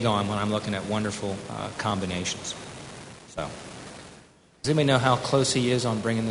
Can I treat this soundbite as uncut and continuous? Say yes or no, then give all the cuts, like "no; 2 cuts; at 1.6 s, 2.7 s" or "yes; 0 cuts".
no; 1 cut; at 4.6 s